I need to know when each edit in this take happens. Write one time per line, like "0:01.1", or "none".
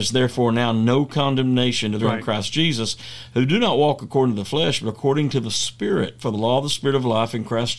0:02.0